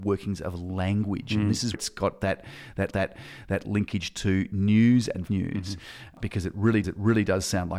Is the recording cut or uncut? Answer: cut